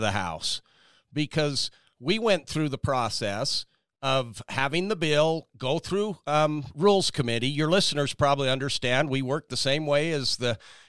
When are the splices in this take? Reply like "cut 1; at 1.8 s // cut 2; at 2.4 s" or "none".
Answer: none